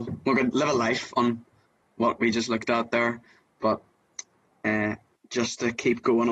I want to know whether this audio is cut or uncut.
uncut